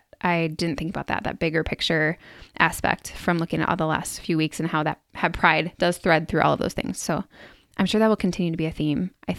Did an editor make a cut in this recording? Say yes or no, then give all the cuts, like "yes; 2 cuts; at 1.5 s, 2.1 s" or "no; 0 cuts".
no; 0 cuts